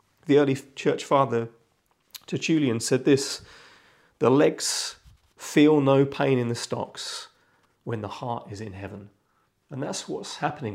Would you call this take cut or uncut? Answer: uncut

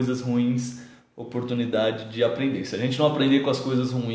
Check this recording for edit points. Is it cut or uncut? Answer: uncut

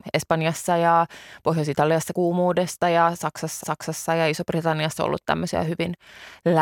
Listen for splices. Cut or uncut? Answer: cut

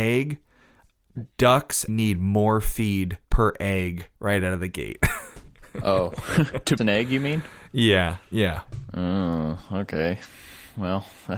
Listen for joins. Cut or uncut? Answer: cut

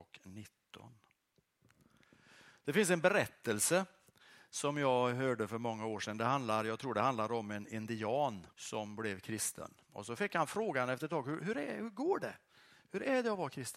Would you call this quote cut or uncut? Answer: cut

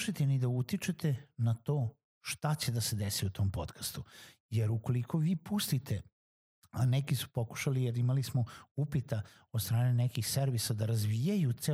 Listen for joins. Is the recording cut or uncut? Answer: uncut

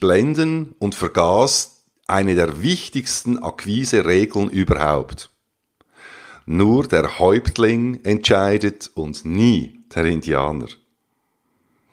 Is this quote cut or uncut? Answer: uncut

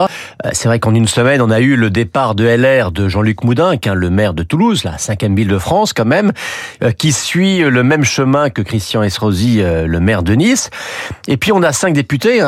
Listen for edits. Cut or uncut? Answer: uncut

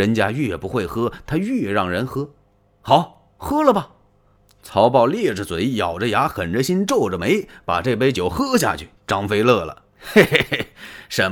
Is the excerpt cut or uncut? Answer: cut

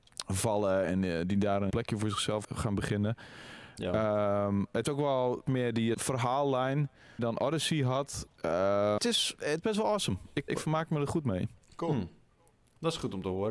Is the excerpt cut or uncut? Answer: cut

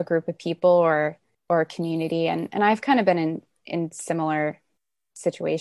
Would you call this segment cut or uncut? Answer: cut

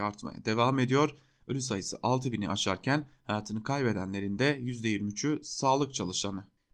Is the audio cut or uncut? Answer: uncut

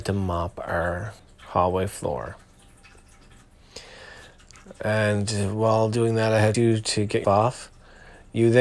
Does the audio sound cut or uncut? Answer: cut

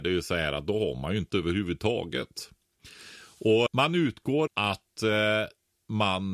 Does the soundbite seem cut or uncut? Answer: cut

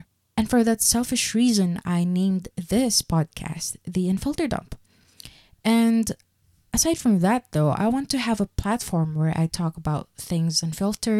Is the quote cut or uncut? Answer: uncut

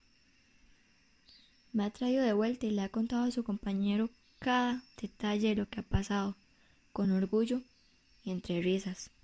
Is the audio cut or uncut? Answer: uncut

